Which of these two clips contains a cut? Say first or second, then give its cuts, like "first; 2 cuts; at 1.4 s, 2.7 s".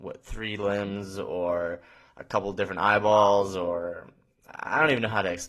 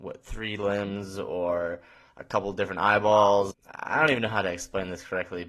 second; 1 cut; at 3.5 s